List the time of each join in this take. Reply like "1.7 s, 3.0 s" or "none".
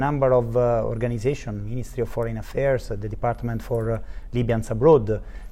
none